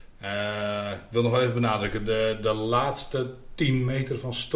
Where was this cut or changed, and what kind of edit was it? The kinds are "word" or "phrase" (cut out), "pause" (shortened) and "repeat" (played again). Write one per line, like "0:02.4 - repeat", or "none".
none